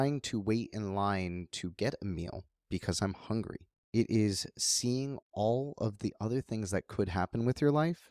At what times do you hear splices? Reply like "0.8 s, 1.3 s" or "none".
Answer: 5.2 s

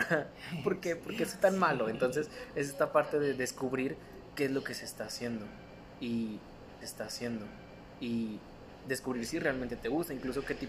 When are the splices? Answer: 6.8 s

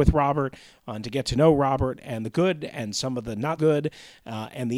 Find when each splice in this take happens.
3.6 s

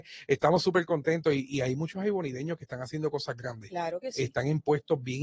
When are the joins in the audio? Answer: none

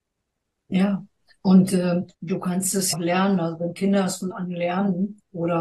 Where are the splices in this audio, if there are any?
2.1 s, 2.9 s, 4.3 s

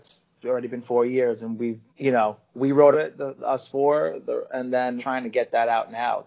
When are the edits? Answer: 1.9 s, 2.9 s, 3.4 s, 5.0 s

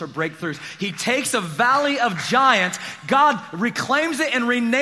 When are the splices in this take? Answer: none

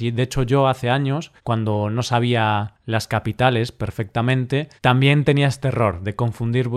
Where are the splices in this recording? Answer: 1.4 s, 4.8 s

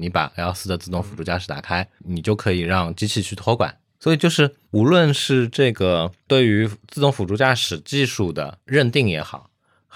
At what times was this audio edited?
none

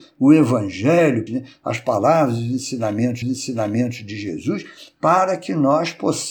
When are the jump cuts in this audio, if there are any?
1.3 s, 3.2 s

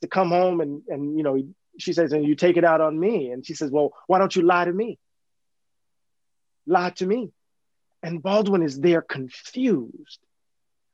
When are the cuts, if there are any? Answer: none

